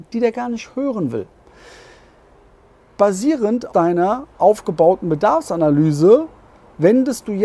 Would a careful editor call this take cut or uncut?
cut